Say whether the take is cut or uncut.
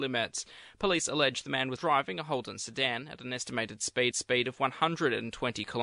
cut